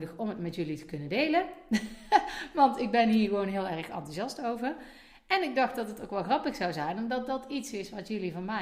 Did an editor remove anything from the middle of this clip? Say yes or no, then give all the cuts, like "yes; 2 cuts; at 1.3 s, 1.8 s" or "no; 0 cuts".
no; 0 cuts